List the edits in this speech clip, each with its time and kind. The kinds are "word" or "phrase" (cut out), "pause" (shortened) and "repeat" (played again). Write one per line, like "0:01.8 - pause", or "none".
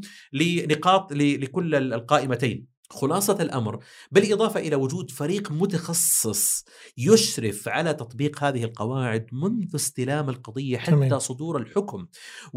0:02.8 - pause